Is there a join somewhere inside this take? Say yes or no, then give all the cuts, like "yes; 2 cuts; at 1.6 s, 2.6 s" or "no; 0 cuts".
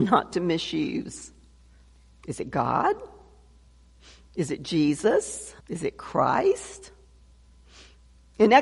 yes; 1 cut; at 5.6 s